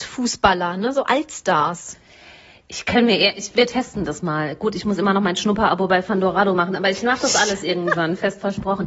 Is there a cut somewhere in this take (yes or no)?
no